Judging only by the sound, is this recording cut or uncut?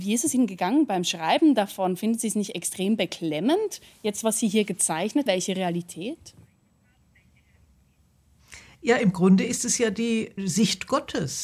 cut